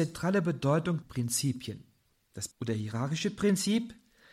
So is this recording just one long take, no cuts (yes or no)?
no